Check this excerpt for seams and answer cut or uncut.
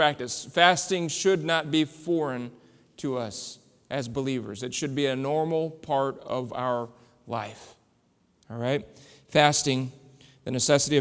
uncut